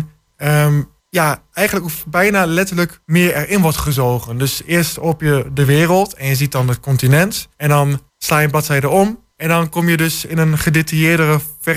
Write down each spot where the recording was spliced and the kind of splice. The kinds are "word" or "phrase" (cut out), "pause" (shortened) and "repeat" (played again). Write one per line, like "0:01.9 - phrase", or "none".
0:01.0 - pause
0:03.0 - pause
0:07.5 - pause
0:08.1 - pause
0:09.3 - pause